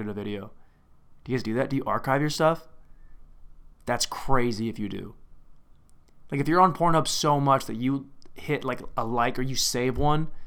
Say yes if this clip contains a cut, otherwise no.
no